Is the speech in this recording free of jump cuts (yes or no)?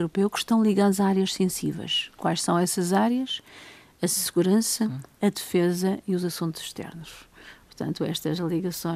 yes